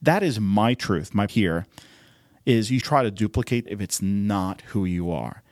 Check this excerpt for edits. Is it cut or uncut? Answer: cut